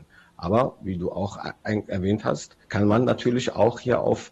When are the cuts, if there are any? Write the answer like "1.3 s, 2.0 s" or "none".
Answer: 2.6 s